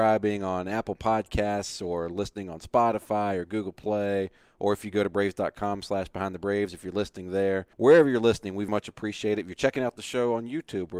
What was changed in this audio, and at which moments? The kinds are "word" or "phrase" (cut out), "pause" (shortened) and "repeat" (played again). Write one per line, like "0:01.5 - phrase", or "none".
0:07.7 - pause
0:08.7 - word